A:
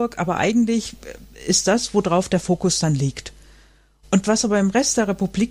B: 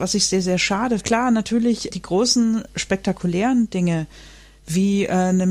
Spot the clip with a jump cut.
B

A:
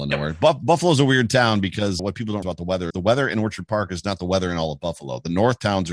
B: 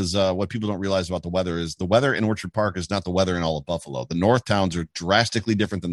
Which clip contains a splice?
A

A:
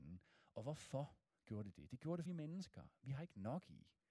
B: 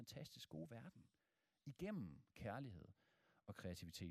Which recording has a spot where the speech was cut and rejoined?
A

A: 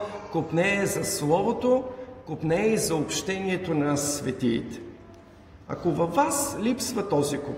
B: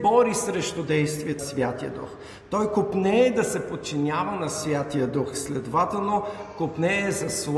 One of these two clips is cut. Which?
B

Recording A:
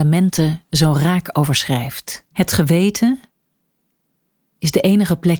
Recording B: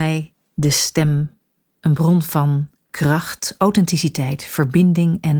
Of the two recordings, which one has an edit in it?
A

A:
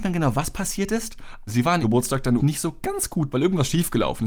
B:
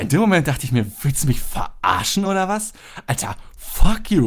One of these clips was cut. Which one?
A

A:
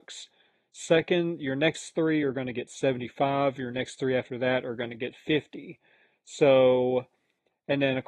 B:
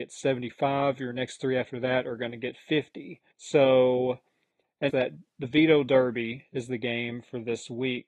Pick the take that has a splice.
B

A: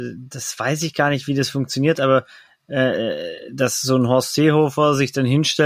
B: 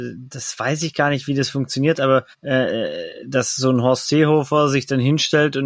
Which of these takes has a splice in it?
B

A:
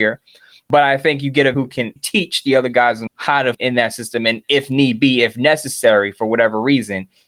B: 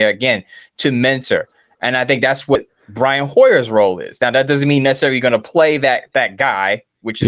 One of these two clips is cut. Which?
A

